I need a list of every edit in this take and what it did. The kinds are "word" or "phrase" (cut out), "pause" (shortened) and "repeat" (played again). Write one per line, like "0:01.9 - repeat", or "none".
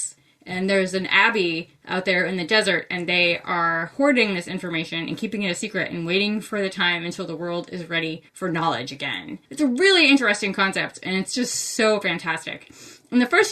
0:08.3 - pause
0:09.5 - pause